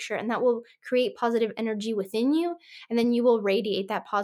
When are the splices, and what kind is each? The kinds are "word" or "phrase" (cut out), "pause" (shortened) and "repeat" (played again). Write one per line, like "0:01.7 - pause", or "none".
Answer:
none